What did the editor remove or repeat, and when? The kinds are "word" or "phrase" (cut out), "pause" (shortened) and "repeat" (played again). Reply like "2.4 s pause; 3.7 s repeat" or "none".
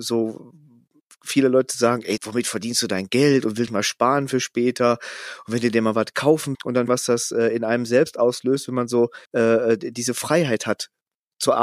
2.2 s word; 3.7 s phrase; 6.5 s word; 6.9 s phrase; 9.3 s pause